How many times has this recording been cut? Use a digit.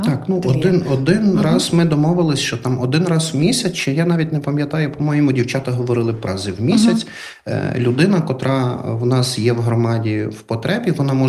1